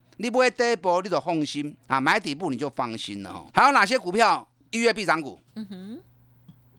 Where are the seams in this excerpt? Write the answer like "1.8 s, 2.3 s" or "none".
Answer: 1.8 s, 3.5 s, 5.5 s

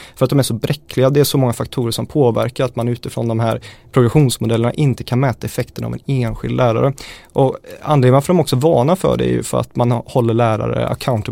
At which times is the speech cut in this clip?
none

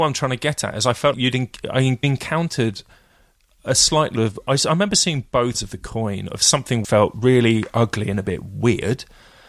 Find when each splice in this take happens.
1.1 s, 2.0 s, 4.2 s, 5.5 s, 6.8 s

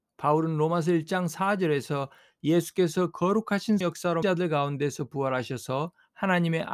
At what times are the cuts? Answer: 3.8 s, 4.2 s

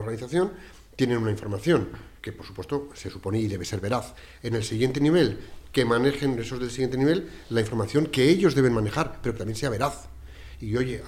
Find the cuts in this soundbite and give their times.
2.2 s

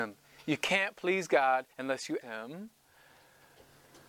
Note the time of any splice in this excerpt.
1.7 s, 2.2 s

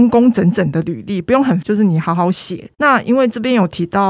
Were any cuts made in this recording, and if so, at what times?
1.6 s

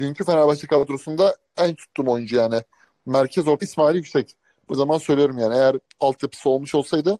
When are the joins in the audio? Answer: 1.8 s, 3.6 s, 4.7 s, 5.9 s

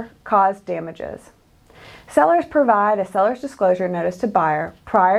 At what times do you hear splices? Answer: none

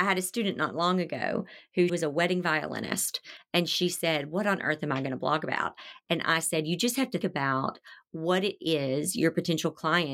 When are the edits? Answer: 1.9 s, 7.2 s

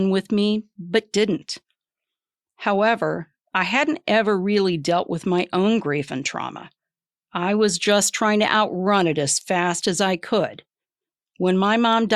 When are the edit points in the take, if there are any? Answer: none

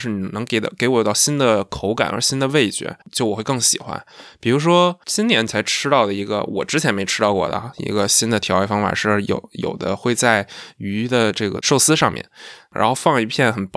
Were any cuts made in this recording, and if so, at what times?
3.0 s, 5.0 s

